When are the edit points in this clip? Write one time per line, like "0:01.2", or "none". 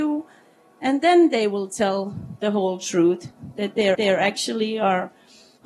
0:03.9